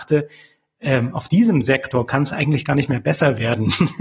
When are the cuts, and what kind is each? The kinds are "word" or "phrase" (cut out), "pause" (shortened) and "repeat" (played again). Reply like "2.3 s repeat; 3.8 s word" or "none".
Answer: none